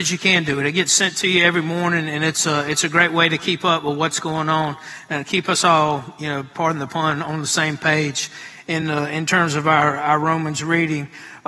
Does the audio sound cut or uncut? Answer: uncut